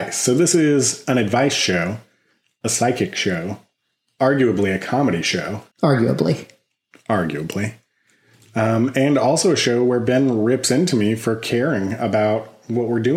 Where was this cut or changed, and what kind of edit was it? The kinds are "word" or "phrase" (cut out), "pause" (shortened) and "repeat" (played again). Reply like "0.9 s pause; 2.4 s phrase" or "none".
4.2 s word; 5.7 s pause